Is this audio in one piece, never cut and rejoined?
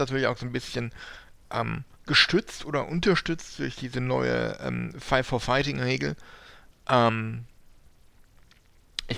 no; 1 cut; at 1.9 s

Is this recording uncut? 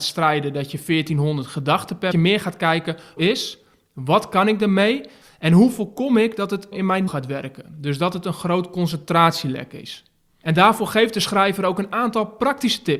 no; 4 cuts; at 2.1 s, 3.2 s, 6.7 s, 7.1 s

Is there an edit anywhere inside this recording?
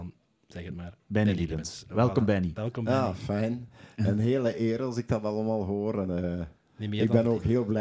no; 0 cuts

